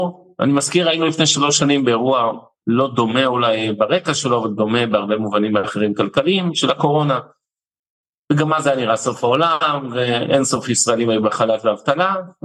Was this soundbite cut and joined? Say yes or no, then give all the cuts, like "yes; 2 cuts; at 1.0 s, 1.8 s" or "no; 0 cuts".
no; 0 cuts